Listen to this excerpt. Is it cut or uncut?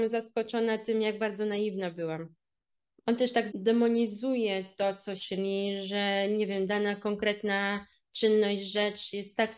cut